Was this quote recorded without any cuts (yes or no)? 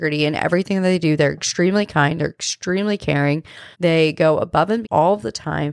no